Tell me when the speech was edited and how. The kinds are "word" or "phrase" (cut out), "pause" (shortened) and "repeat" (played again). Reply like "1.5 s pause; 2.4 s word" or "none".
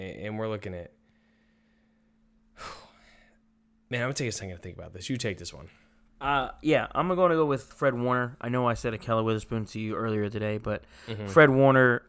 7.7 s word